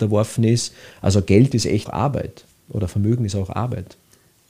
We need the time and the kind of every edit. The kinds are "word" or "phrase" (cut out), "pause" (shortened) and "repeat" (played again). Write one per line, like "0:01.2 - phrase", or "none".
0:01.9 - word